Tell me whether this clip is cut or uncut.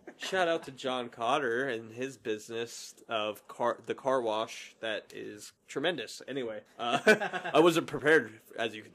cut